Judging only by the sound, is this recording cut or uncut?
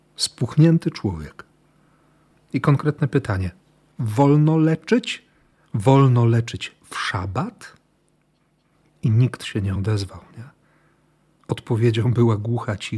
uncut